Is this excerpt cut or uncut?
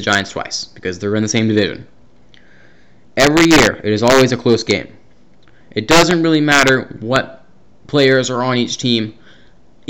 uncut